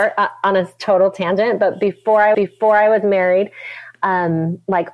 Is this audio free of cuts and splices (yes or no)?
no